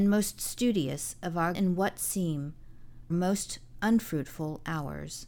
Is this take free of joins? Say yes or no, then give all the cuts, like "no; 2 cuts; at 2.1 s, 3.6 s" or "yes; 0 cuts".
no; 2 cuts; at 1.5 s, 3.1 s